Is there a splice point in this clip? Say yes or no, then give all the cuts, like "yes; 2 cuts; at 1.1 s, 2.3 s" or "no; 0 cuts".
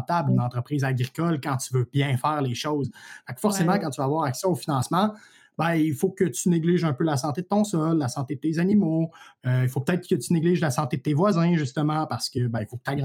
no; 0 cuts